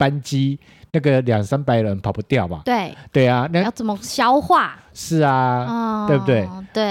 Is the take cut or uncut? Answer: uncut